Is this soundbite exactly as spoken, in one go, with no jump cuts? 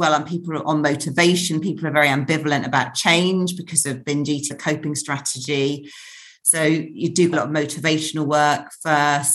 no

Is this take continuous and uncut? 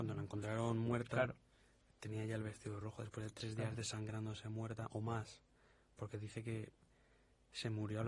yes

